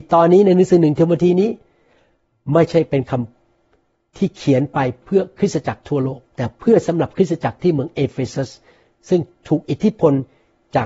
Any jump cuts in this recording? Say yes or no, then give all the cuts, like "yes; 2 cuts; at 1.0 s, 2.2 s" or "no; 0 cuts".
no; 0 cuts